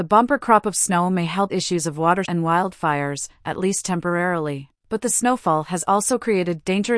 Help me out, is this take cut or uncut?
cut